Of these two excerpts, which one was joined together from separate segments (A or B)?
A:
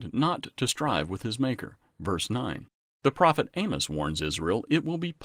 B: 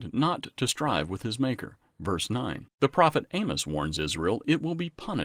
B